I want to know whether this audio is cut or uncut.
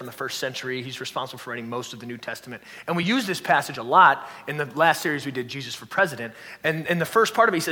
uncut